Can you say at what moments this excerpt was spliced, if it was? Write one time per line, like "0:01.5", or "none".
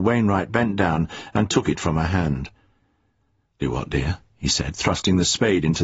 0:03.6